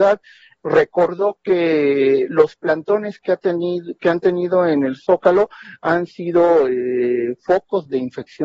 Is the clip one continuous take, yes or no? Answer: yes